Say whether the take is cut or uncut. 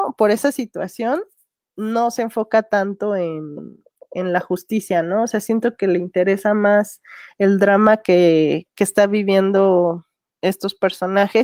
uncut